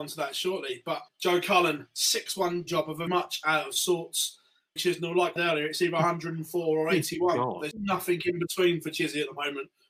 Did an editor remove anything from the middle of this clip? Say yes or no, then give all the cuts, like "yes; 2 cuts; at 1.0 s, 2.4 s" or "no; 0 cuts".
yes; 6 cuts; at 1.1 s, 2.7 s, 3.1 s, 4.8 s, 5.4 s, 7.7 s